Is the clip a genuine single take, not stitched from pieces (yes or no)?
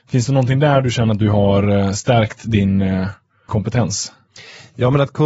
no